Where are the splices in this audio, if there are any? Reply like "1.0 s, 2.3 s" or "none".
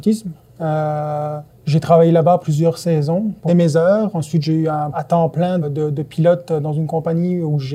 1.5 s, 2.4 s, 3.5 s, 4.9 s, 5.6 s